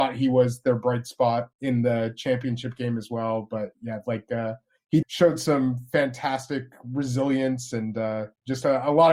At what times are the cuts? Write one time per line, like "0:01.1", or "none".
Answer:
0:01.5
0:05.0